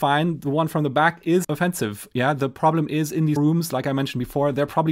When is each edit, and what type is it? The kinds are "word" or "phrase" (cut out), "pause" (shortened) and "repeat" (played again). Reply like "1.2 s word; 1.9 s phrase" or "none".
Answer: 1.4 s word; 3.4 s word